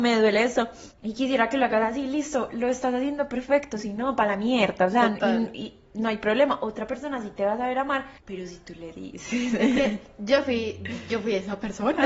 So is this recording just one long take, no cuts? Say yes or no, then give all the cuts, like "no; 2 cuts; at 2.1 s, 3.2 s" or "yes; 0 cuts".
no; 2 cuts; at 0.9 s, 8.2 s